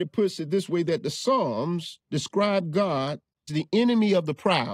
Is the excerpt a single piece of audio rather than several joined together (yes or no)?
no